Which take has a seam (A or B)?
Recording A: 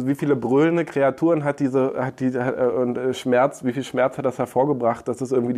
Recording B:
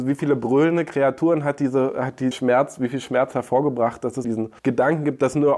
B